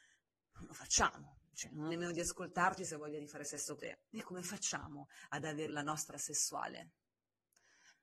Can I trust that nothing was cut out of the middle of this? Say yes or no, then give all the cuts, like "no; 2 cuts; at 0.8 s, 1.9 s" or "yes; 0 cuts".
no; 6 cuts; at 1.9 s, 2.8 s, 3.8 s, 4.2 s, 5.7 s, 6.1 s